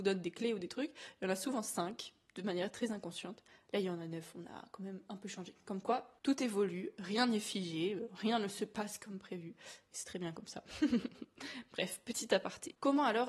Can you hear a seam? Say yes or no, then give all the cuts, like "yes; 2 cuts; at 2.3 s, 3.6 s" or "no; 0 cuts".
no; 0 cuts